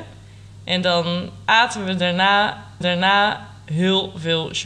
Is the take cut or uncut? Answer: cut